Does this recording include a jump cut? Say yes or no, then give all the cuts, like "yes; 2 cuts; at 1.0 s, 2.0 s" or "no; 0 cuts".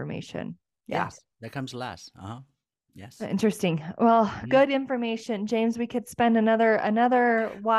no; 0 cuts